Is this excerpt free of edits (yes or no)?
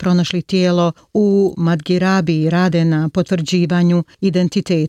yes